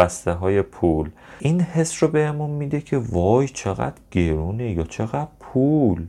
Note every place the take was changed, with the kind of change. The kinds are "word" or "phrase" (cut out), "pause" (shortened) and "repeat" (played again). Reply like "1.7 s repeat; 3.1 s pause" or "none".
none

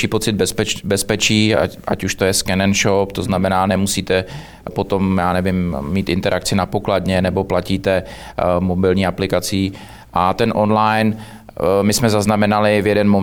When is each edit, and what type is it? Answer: 4.7 s word

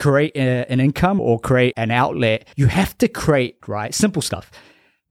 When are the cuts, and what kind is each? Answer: 1.2 s word; 1.7 s word; 2.5 s pause; 3.6 s phrase

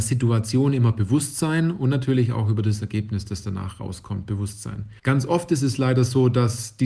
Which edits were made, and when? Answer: 5.0 s pause

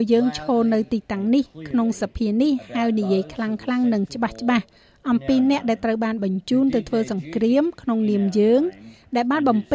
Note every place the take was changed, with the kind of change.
none

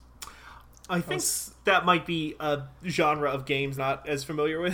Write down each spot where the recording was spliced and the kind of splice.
3.8 s phrase

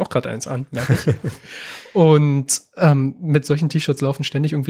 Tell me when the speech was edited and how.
none

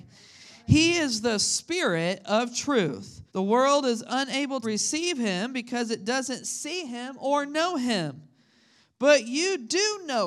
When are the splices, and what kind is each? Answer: 3.3 s pause; 4.6 s word

